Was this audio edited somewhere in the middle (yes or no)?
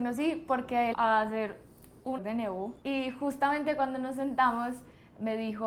yes